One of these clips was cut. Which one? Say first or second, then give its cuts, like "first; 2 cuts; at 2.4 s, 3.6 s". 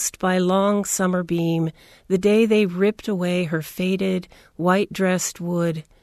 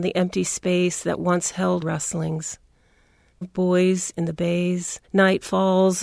second; 3 cuts; at 1.8 s, 3.4 s, 5.0 s